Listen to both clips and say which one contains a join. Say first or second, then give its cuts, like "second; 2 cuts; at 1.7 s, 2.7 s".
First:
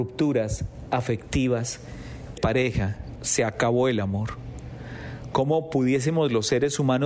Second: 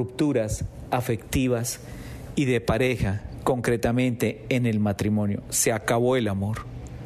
first; 2 cuts; at 2.4 s, 3.2 s